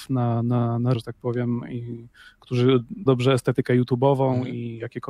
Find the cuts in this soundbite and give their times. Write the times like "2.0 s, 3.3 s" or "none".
0.9 s, 3.1 s